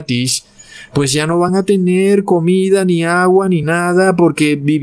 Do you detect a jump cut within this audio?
no; 0 cuts

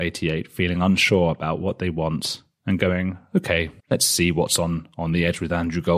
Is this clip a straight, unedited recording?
no; 1 cut; at 3.8 s

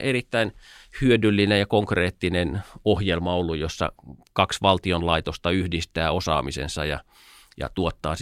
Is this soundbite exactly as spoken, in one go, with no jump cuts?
yes; 0 cuts

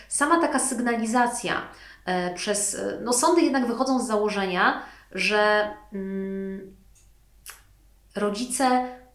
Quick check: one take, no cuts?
yes; 0 cuts

